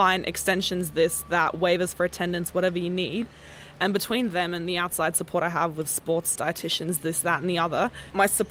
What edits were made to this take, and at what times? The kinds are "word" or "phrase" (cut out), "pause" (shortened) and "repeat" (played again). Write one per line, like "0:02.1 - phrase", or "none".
0:06.4 - word